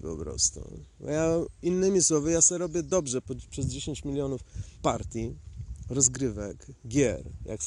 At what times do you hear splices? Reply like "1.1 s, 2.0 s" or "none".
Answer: 4.7 s